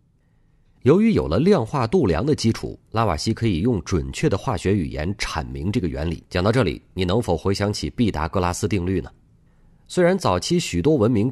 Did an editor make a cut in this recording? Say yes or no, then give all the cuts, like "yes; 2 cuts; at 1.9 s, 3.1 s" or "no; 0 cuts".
yes; 1 cut; at 6.3 s